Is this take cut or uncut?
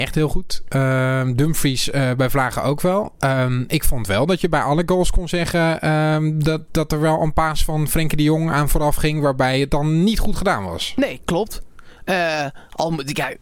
uncut